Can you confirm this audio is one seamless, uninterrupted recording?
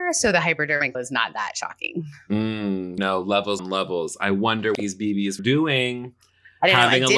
no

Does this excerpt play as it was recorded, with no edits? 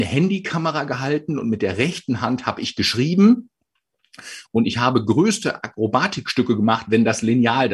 yes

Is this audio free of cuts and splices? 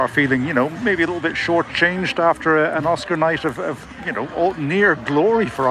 yes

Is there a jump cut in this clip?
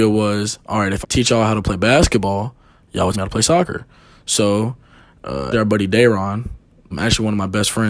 yes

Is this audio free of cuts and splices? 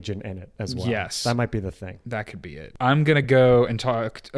yes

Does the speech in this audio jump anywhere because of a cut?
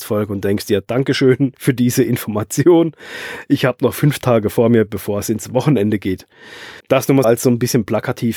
yes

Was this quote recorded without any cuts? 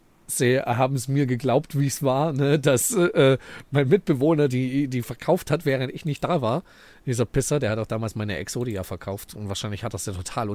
yes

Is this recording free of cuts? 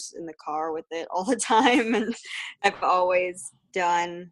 yes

